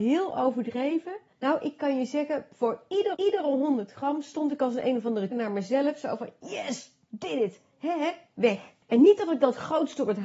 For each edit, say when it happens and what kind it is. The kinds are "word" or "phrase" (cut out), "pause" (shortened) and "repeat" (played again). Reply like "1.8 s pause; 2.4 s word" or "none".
1.3 s pause; 3.1 s repeat; 5.3 s word; 8.8 s pause